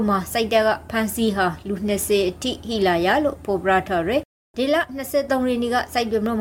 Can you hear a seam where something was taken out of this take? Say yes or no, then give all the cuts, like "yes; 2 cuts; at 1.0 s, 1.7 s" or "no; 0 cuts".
no; 0 cuts